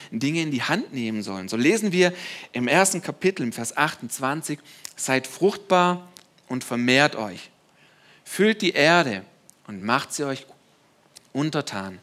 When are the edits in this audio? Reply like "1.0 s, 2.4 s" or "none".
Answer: none